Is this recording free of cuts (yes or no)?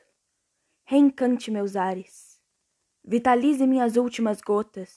yes